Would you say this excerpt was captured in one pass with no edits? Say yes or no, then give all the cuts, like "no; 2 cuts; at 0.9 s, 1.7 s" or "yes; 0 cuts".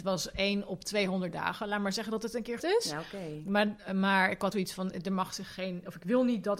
no; 2 cuts; at 2.6 s, 4.5 s